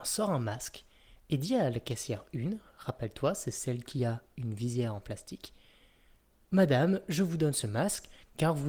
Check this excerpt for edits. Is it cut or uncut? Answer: uncut